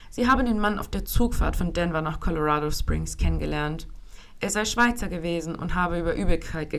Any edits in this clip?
no; 0 cuts

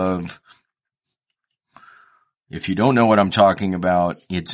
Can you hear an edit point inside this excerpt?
no; 0 cuts

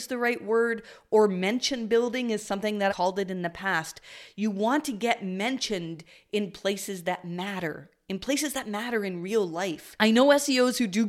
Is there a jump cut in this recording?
yes; 1 cut; at 2.9 s

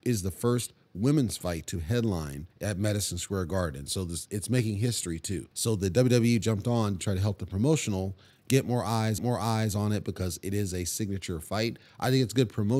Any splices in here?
yes; 3 cuts; at 2.5 s, 5.5 s, 9.2 s

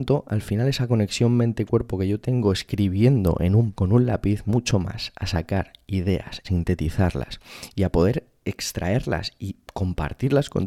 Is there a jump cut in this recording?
yes; 3 cuts; at 3.7 s, 4.5 s, 6.4 s

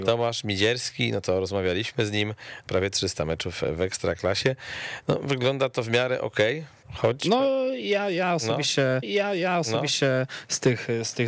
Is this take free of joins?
no; 3 cuts; at 2.7 s, 6.8 s, 9.0 s

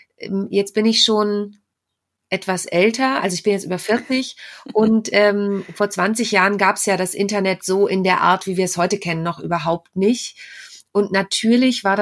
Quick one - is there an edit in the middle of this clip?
no; 0 cuts

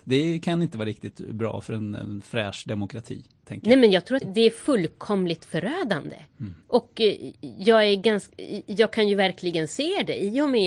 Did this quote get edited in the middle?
yes; 2 cuts; at 4.2 s, 6.6 s

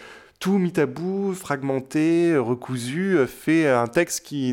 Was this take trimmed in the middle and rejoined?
no; 0 cuts

